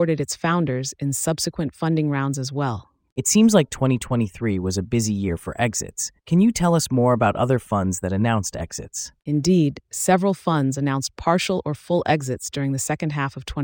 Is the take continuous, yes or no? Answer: no